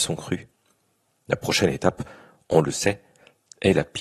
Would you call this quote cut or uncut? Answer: uncut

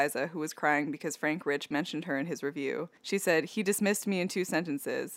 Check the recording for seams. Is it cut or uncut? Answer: cut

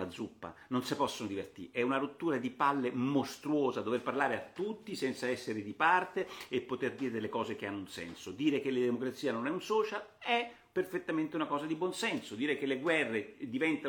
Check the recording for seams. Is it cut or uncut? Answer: uncut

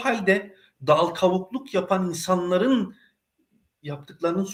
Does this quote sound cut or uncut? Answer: uncut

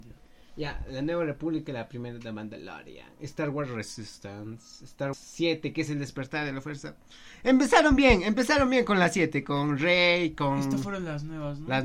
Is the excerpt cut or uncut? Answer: cut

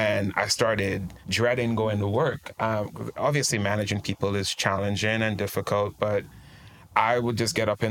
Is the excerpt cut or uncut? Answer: cut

